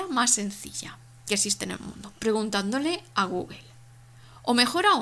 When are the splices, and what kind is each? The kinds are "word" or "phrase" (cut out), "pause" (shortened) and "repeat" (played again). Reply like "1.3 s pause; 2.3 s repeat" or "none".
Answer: none